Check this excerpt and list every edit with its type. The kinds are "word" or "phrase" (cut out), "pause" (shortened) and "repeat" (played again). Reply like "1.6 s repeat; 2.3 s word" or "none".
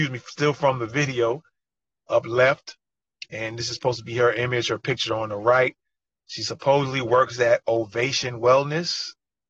none